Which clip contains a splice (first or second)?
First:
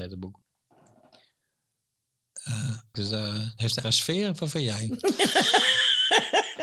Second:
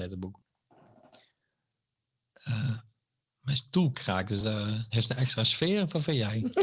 first